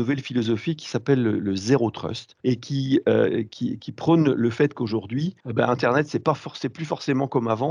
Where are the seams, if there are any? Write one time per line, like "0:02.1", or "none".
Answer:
0:02.4
0:05.4